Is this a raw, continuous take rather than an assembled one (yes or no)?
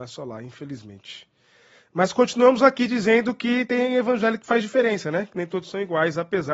yes